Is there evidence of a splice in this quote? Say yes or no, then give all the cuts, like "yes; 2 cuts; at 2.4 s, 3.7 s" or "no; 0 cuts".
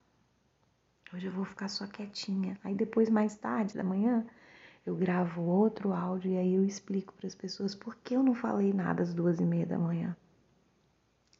yes; 1 cut; at 3.7 s